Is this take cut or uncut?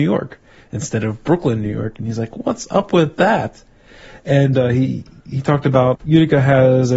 uncut